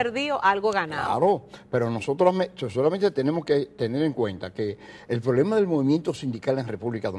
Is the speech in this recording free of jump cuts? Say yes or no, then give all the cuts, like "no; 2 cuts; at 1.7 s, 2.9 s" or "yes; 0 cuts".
yes; 0 cuts